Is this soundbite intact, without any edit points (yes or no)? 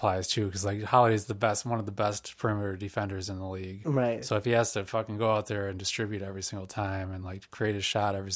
yes